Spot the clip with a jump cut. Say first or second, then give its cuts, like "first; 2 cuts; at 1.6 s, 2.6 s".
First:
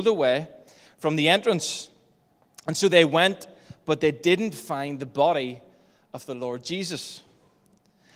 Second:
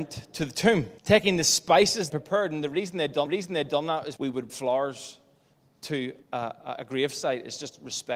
second; 6 cuts; at 1.0 s, 2.1 s, 3.3 s, 4.2 s, 4.5 s, 6.2 s